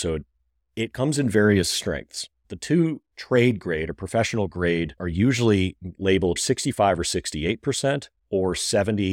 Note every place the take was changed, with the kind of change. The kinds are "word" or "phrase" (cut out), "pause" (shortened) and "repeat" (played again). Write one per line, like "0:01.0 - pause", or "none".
0:03.1 - word
0:05.0 - word
0:06.4 - word